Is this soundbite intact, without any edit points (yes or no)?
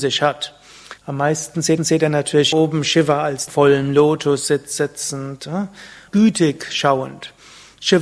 no